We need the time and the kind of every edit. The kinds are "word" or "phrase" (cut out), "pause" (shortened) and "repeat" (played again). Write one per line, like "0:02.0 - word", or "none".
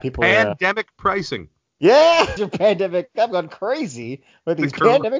0:02.4 - word